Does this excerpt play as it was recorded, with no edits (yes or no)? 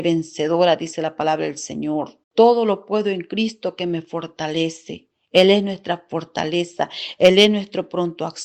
no